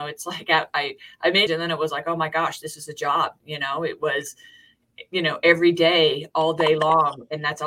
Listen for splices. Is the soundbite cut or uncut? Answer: cut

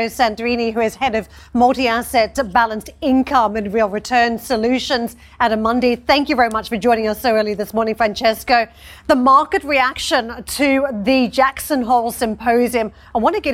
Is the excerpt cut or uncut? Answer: uncut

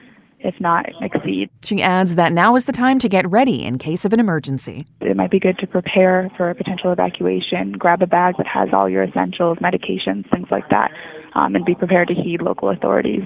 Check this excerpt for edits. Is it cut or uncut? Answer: cut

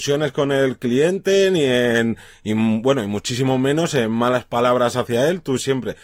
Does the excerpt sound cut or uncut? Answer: uncut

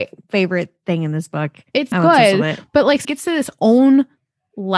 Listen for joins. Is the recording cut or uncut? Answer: cut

